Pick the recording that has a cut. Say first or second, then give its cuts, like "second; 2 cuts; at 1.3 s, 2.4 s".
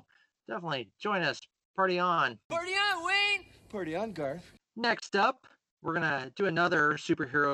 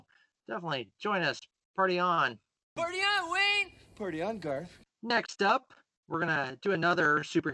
first; 1 cut; at 2.4 s